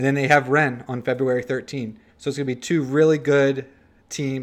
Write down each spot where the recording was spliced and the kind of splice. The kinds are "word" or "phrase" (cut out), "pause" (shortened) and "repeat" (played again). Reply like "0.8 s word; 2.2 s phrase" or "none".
2.1 s pause